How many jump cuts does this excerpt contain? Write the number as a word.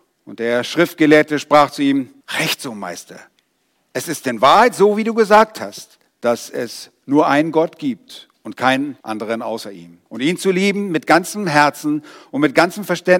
four